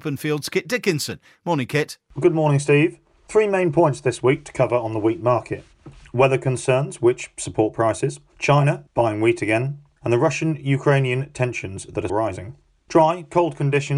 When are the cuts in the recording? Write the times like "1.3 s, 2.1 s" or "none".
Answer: 12.1 s